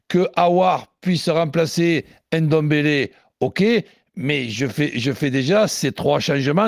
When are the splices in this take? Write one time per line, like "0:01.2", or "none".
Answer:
none

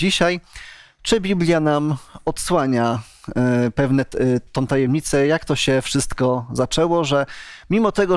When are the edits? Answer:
none

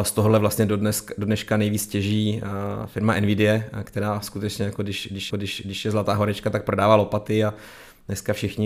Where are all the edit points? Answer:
0:05.3

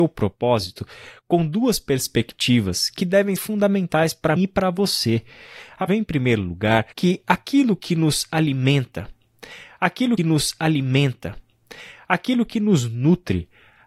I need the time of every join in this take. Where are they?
0:03.4
0:04.4
0:05.9
0:06.9
0:10.2

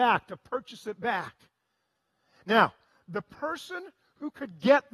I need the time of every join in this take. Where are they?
none

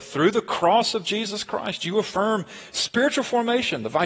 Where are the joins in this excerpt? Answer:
none

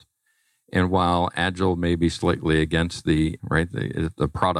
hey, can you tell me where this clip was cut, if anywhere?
0:03.4

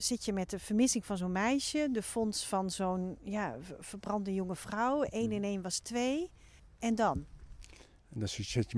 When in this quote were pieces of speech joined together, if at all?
0:06.6

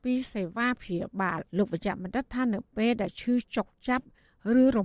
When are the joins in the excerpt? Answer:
0:01.5

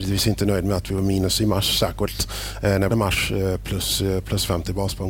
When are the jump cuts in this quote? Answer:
0:02.9

